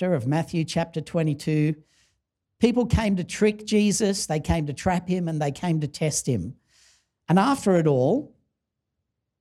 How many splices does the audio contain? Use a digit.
0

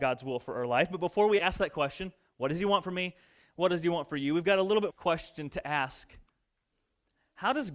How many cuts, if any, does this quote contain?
2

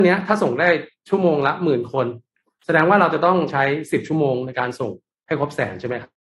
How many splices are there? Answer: 0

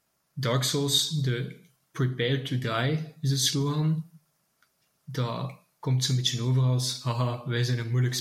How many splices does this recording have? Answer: 0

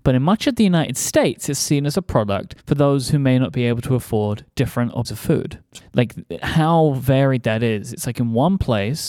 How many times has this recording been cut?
4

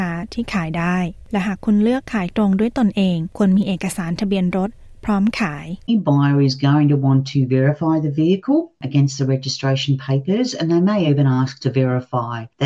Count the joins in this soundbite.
0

